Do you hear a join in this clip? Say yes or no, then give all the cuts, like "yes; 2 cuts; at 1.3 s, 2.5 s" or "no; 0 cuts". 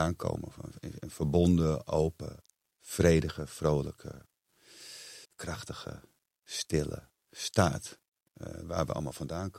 yes; 2 cuts; at 2.5 s, 5.2 s